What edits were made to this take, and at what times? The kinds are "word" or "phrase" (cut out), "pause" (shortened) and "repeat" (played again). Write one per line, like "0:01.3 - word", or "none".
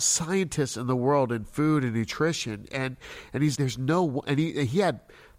0:03.6 - word

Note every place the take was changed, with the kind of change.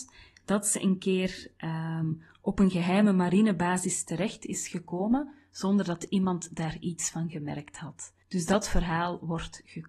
0:08.2 - pause

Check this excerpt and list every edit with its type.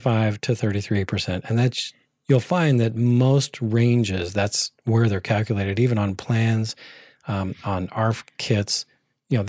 none

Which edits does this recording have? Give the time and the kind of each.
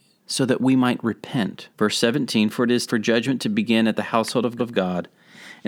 0:01.7 - pause
0:02.9 - word
0:04.6 - repeat

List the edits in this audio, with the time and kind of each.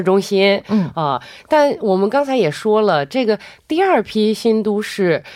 none

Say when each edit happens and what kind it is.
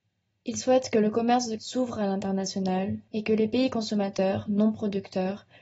0:01.6 - word
0:03.1 - pause

